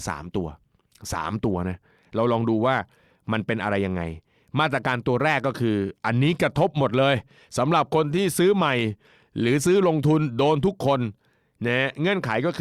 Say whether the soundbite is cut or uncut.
uncut